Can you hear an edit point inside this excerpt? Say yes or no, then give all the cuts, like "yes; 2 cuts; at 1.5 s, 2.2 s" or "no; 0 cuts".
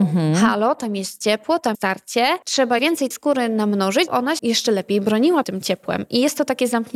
yes; 6 cuts; at 1.7 s, 2.8 s, 3.1 s, 4.1 s, 4.4 s, 5.4 s